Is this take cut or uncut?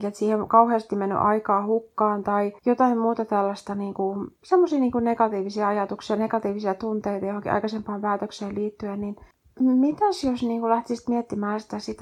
cut